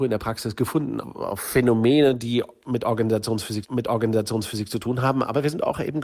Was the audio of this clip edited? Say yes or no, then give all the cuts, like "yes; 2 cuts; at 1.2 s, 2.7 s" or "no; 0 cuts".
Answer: yes; 2 cuts; at 1.0 s, 3.6 s